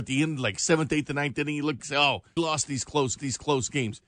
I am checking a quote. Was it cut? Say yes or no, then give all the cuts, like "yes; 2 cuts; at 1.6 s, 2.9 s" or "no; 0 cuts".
yes; 3 cuts; at 1.8 s, 2.4 s, 3.2 s